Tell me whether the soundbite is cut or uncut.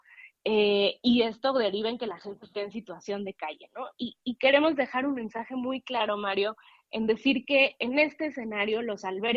uncut